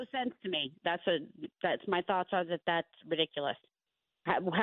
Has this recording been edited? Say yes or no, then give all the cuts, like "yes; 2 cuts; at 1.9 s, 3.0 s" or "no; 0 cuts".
no; 0 cuts